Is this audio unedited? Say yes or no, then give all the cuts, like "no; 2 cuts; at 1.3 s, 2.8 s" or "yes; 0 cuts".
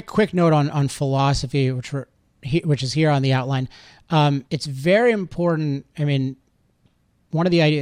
no; 1 cut; at 4.5 s